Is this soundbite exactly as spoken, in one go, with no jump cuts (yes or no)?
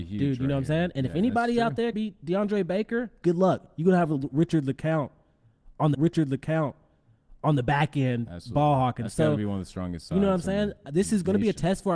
no